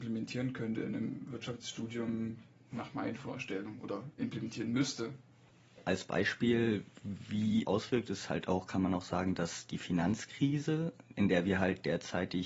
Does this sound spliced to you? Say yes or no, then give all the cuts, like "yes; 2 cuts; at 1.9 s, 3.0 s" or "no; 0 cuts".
yes; 2 cuts; at 4.1 s, 7.6 s